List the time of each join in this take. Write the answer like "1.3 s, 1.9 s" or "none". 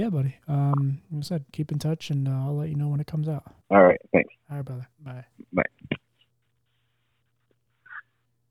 3.6 s, 4.9 s

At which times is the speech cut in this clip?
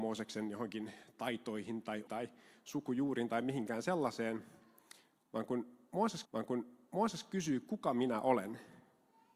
2.1 s, 6.2 s

